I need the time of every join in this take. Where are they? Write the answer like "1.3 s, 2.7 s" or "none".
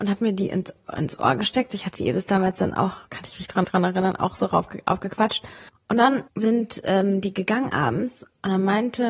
3.0 s, 3.6 s, 5.7 s, 6.3 s